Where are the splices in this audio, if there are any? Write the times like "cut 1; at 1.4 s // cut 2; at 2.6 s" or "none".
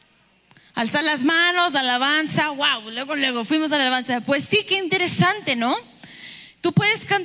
none